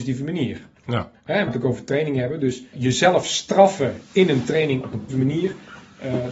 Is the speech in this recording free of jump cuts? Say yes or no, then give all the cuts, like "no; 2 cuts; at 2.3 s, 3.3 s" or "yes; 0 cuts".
no; 3 cuts; at 1.5 s, 2.7 s, 5.1 s